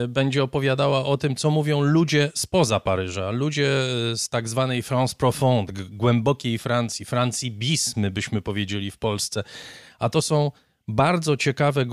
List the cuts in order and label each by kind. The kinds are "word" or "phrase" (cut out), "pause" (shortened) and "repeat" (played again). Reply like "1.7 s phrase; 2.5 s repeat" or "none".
none